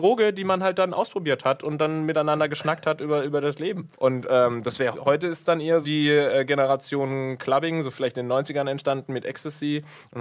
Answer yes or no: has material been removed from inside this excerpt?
yes